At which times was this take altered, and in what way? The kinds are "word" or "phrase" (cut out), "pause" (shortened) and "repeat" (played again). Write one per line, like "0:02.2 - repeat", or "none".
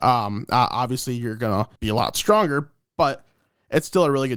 0:01.8 - pause